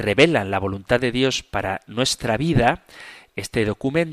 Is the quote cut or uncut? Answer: uncut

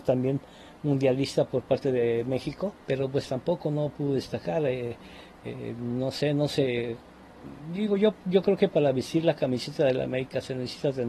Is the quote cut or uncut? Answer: cut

